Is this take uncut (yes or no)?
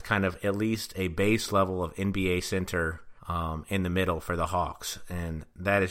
no